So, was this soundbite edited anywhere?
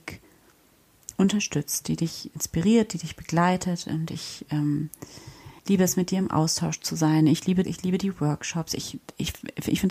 yes; 2 cuts; at 5.6 s, 7.6 s

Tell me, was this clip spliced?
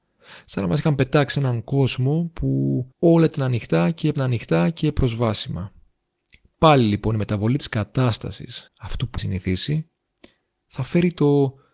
yes; 5 cuts; at 1.3 s, 2.9 s, 4.1 s, 8.7 s, 9.2 s

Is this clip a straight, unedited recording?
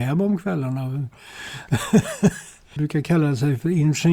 no; 1 cut; at 2.8 s

